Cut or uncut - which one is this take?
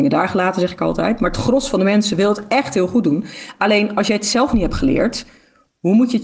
uncut